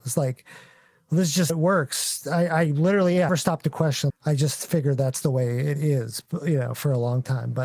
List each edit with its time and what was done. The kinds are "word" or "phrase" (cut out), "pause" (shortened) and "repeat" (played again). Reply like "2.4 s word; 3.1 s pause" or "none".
1.5 s word; 3.3 s word; 4.1 s word